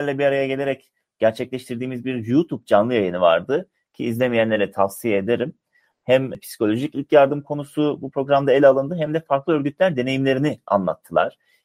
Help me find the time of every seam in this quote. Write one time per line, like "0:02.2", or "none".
none